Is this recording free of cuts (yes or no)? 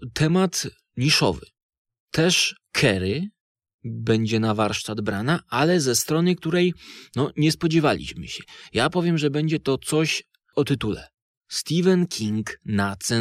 yes